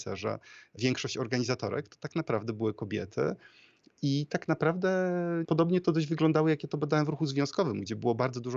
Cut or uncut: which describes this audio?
uncut